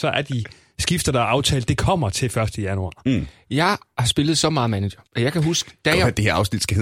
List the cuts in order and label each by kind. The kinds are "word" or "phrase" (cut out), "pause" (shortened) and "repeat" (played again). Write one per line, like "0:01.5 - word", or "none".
0:05.1 - pause